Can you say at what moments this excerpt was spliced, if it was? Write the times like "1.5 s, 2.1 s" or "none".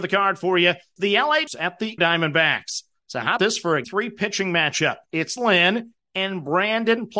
1.0 s, 1.5 s, 2.0 s, 3.4 s, 3.8 s, 5.4 s